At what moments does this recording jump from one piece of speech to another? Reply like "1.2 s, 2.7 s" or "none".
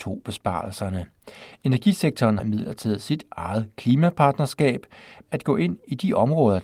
2.4 s, 5.2 s